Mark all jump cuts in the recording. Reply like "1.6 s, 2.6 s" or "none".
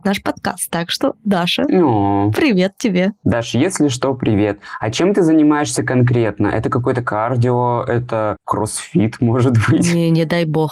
none